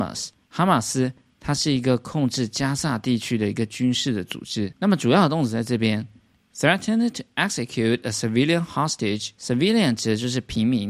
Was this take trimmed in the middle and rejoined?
no; 0 cuts

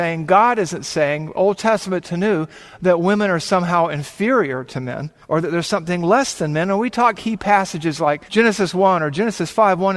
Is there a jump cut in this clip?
yes; 3 cuts; at 5.2 s, 7.2 s, 8.3 s

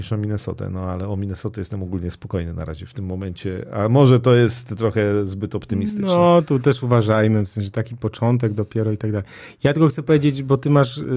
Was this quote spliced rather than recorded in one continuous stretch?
no; 0 cuts

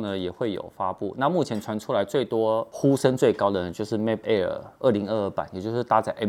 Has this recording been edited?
yes; 1 cut; at 4.2 s

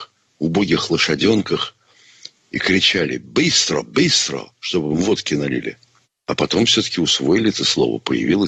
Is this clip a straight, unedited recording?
no; 2 cuts; at 4.5 s, 6.0 s

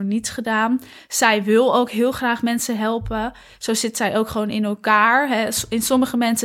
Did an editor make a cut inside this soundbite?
no; 0 cuts

